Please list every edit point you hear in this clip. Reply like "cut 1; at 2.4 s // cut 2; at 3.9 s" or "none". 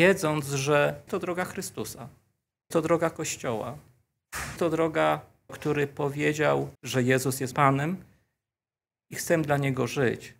cut 1; at 1.1 s // cut 2; at 2.7 s // cut 3; at 4.6 s // cut 4; at 5.5 s // cut 5; at 6.7 s // cut 6; at 7.5 s